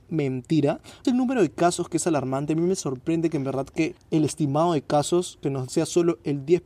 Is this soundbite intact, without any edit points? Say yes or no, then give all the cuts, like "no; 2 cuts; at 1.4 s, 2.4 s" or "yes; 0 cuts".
no; 2 cuts; at 1.0 s, 5.7 s